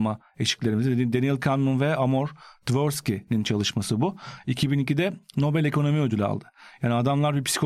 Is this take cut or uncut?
uncut